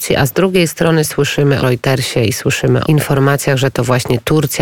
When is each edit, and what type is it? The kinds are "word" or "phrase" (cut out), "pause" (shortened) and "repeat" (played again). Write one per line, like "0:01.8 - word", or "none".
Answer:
0:01.6 - word
0:02.8 - word